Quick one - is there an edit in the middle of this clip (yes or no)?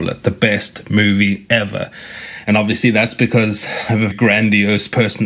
yes